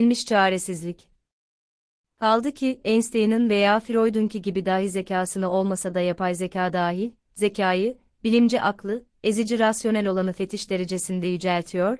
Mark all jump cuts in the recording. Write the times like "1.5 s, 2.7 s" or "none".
none